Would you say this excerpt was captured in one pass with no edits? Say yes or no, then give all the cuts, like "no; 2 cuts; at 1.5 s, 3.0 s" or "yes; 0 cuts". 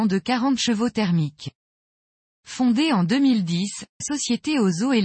no; 1 cut; at 4.0 s